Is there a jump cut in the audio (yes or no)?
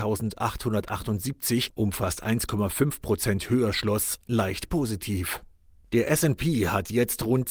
no